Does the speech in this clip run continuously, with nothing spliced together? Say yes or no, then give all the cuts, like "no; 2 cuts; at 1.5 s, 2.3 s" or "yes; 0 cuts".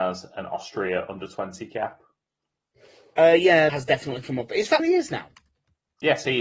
no; 2 cuts; at 3.7 s, 4.8 s